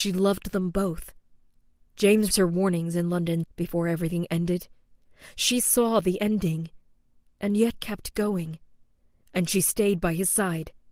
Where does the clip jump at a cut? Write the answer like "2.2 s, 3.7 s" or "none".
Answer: 2.3 s, 3.4 s, 7.7 s